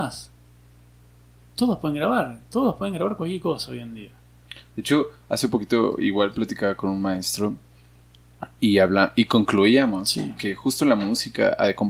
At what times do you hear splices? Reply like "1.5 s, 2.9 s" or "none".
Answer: none

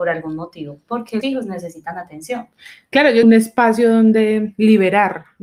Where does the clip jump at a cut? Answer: 1.2 s, 3.2 s

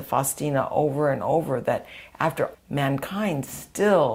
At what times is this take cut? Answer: 2.5 s

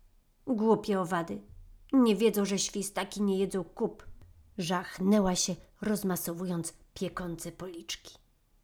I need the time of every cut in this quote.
none

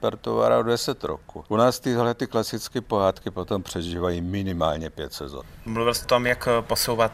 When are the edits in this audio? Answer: 6.0 s

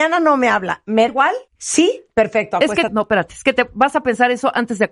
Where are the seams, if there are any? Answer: 1.1 s, 1.5 s, 2.9 s

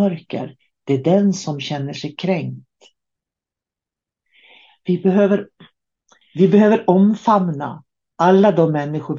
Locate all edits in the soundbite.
none

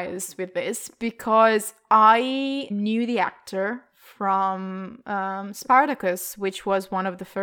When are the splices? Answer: 2.7 s

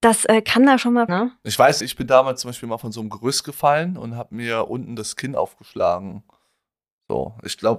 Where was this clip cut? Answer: 1.1 s, 1.8 s

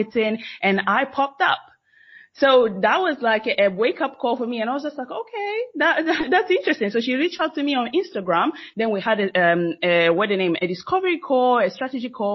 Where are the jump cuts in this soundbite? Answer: none

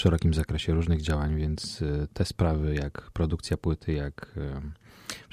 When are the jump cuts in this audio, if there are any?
none

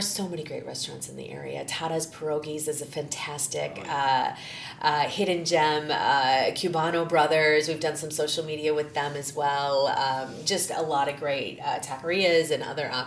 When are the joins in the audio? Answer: none

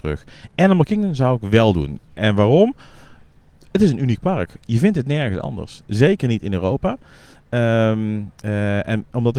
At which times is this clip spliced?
2.1 s, 8.4 s

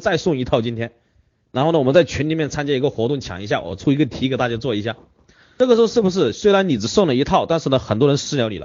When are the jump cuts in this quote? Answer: none

